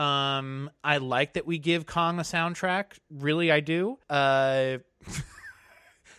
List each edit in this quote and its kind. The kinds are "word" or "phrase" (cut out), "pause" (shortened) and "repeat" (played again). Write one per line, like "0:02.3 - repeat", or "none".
0:04.0 - pause

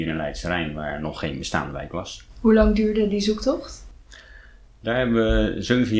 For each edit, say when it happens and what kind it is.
none

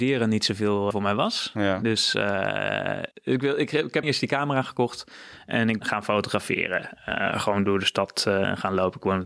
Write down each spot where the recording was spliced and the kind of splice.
0:00.9 - word
0:03.1 - pause
0:04.0 - word
0:05.8 - word
0:07.6 - word

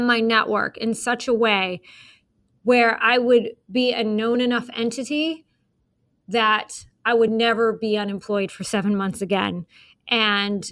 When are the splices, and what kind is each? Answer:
none

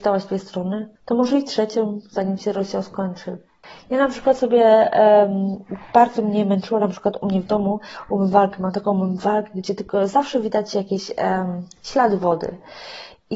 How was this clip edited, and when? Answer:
0:01.0 - pause

